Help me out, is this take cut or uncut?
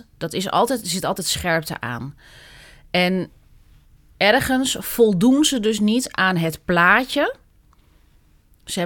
uncut